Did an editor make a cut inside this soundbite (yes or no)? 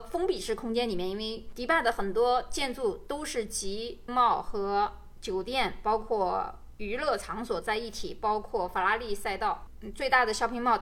yes